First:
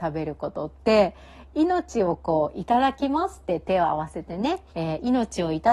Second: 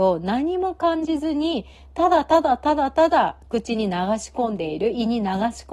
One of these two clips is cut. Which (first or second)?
first